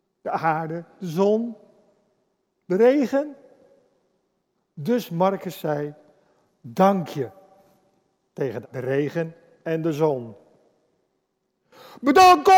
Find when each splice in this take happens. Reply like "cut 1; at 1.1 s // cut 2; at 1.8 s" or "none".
cut 1; at 8.6 s